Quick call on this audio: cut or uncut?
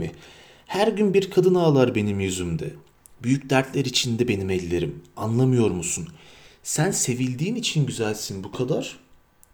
uncut